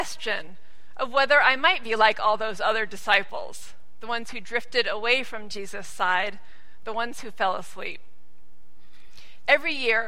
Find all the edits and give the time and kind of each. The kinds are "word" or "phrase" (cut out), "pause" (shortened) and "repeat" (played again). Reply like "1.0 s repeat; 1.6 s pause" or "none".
none